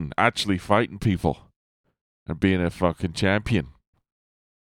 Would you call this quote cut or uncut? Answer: uncut